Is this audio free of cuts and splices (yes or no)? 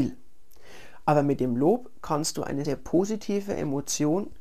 no